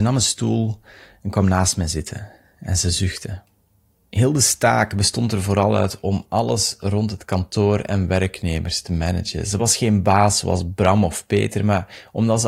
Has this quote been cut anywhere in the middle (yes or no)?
no